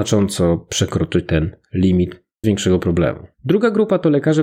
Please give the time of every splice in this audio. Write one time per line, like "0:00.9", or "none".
0:02.4
0:03.3